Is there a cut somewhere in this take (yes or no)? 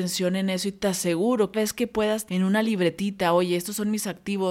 yes